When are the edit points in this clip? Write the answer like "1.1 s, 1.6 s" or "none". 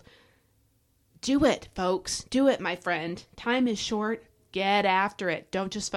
none